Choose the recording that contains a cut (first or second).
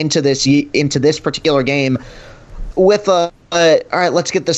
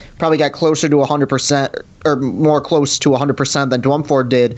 first